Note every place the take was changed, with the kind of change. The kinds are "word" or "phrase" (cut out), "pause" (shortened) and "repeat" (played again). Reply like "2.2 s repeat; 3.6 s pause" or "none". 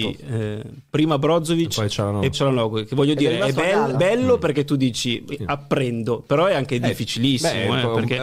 2.3 s word; 3.9 s word